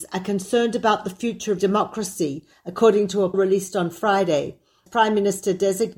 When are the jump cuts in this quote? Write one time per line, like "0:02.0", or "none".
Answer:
0:01.6
0:03.3
0:04.9